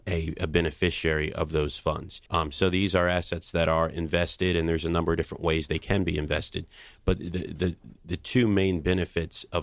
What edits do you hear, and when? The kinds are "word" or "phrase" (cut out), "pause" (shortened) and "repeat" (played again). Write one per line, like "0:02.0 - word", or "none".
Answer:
0:02.3 - pause